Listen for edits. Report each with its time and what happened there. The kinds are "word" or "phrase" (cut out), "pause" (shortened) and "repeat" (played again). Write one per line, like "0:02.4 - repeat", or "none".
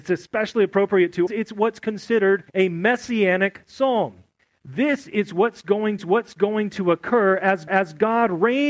0:01.3 - phrase
0:02.5 - pause
0:04.4 - pause
0:06.0 - repeat
0:07.7 - repeat